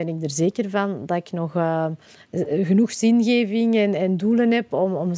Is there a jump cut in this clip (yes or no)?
no